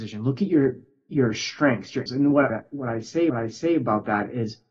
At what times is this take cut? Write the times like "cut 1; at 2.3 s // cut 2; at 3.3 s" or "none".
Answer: cut 1; at 2.1 s // cut 2; at 2.5 s // cut 3; at 3.3 s